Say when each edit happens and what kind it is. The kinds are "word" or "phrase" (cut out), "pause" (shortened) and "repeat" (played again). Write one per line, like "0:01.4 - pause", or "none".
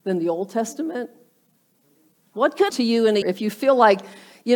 0:02.7 - word
0:03.2 - word